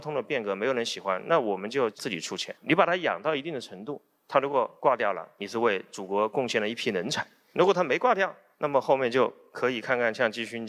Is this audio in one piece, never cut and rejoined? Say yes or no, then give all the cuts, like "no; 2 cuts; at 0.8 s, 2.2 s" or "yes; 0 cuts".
no; 1 cut; at 2.6 s